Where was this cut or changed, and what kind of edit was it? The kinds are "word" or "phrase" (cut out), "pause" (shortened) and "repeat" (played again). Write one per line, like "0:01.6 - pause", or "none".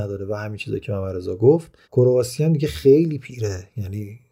0:01.8 - pause